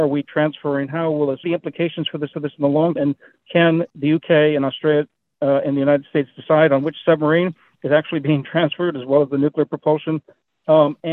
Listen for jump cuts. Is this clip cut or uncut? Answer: cut